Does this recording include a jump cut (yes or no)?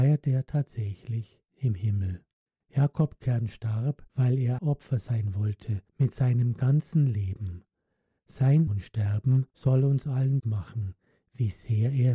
yes